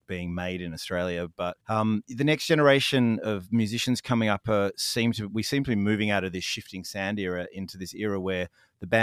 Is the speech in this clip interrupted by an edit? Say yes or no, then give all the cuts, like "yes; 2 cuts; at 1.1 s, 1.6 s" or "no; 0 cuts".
yes; 1 cut; at 1.6 s